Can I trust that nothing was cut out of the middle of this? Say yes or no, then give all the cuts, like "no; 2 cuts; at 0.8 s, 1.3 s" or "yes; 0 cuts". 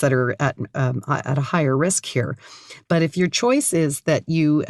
yes; 0 cuts